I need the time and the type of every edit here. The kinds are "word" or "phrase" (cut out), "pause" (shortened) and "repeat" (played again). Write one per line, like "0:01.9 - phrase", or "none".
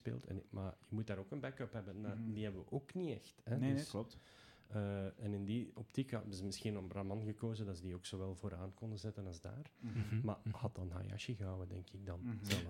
none